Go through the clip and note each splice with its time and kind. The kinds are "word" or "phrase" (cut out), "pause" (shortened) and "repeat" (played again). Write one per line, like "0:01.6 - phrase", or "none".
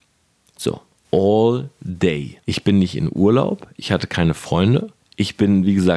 0:02.4 - pause
0:05.0 - pause